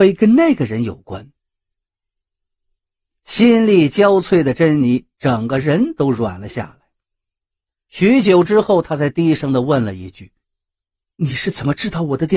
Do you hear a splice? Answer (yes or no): yes